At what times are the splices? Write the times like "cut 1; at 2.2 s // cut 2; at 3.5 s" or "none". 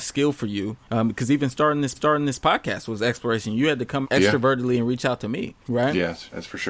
cut 1; at 1.9 s // cut 2; at 4.0 s